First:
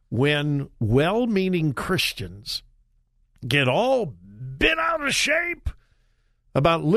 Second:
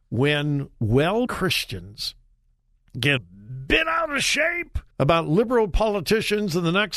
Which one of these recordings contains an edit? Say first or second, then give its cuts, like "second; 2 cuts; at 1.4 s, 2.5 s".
second; 3 cuts; at 1.3 s, 3.2 s, 4.9 s